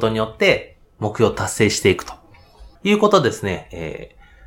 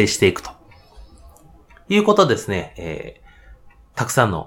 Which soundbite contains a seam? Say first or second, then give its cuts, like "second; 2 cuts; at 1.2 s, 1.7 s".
first; 1 cut; at 2.8 s